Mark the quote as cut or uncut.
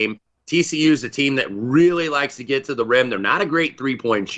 uncut